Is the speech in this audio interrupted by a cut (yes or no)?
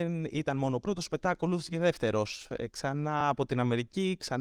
no